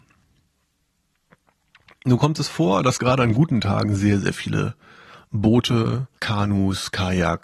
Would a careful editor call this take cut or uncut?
cut